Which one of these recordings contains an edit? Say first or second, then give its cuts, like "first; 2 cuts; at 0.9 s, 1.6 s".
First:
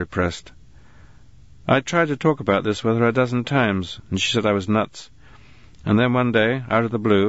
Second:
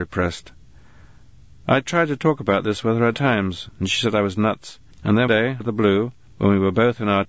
second; 5 cuts; at 3.1 s, 4.9 s, 5.3 s, 5.6 s, 6.3 s